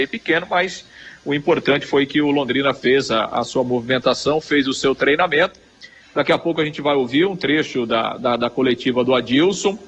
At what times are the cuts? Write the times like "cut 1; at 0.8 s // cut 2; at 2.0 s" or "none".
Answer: none